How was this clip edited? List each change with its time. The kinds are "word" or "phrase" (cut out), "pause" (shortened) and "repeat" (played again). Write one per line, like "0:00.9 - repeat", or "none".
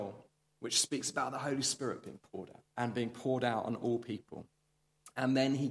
0:02.7 - pause